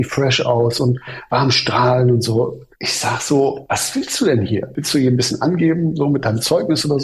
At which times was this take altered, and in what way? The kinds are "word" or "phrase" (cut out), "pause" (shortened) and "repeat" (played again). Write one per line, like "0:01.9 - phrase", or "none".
0:02.7 - pause